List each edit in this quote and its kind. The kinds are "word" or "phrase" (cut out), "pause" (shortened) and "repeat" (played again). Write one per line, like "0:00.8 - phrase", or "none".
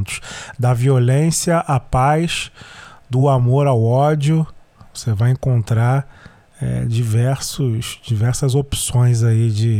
none